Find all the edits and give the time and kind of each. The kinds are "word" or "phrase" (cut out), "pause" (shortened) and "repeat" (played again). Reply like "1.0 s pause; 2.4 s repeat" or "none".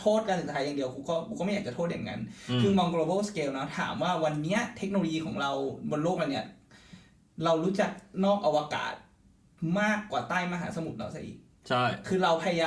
none